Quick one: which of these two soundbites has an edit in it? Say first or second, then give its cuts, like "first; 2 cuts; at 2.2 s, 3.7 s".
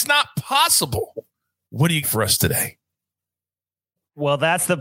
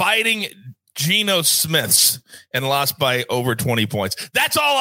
first; 1 cut; at 2.0 s